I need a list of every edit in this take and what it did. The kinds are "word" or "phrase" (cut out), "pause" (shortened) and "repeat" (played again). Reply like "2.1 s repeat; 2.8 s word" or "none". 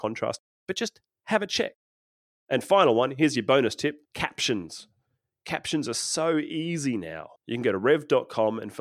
4.0 s pause; 7.4 s pause